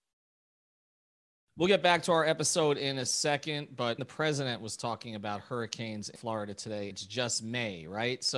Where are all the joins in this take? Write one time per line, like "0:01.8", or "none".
0:04.0
0:06.2
0:06.9